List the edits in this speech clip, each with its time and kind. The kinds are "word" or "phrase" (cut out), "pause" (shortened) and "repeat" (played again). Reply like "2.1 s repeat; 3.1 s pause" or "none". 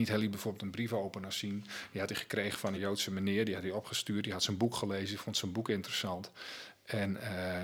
2.7 s phrase